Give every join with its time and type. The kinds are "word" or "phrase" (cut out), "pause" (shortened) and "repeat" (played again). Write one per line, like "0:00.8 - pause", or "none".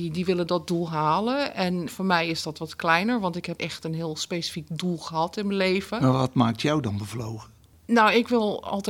0:01.9 - word
0:03.6 - word